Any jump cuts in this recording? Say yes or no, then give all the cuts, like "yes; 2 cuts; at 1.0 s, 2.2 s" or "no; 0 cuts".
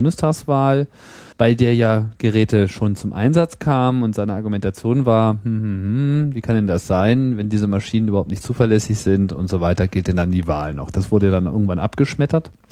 yes; 1 cut; at 1.3 s